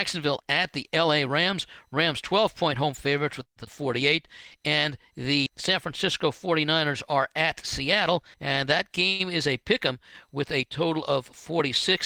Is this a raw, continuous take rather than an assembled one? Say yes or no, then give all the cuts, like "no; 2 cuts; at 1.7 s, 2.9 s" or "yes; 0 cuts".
no; 3 cuts; at 3.7 s, 5.5 s, 8.3 s